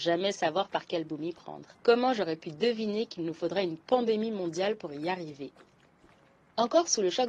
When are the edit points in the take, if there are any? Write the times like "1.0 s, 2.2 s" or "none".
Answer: 1.7 s